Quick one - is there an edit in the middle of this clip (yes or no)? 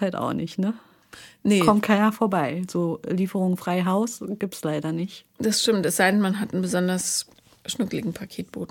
no